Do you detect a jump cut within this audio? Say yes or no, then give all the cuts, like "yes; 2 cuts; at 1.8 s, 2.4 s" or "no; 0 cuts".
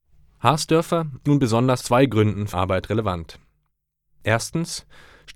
yes; 3 cuts; at 1.2 s, 1.8 s, 2.5 s